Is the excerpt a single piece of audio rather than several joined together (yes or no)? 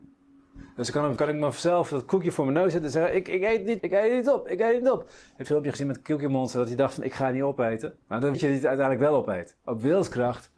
no